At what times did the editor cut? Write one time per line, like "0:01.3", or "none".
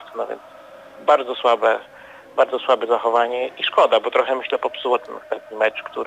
none